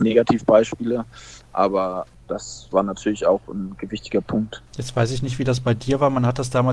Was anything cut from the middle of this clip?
yes; 1 cut; at 4.7 s

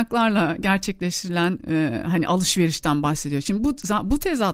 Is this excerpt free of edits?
yes; 0 cuts

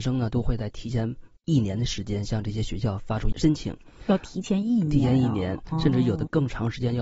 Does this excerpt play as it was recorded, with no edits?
no; 1 cut; at 1.4 s

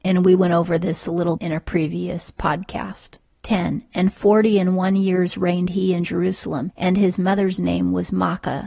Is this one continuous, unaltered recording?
no; 1 cut; at 1.4 s

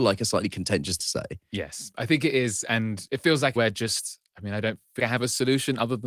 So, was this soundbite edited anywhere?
yes; 3 cuts; at 1.0 s, 3.6 s, 5.0 s

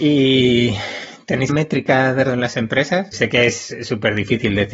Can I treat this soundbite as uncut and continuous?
no; 3 cuts; at 1.5 s, 2.2 s, 3.1 s

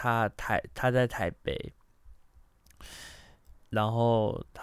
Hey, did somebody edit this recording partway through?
no; 0 cuts

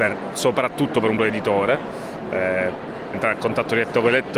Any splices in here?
yes; 2 cuts; at 1.2 s, 3.1 s

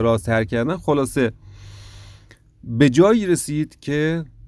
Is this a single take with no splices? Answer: yes; 0 cuts

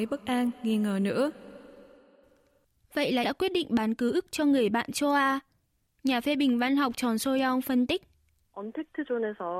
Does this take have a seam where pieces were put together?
yes; 1 cut; at 3.2 s

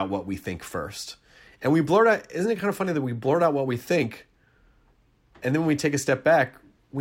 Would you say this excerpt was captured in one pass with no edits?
yes; 0 cuts

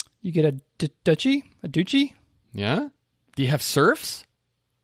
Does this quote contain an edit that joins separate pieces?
no; 0 cuts

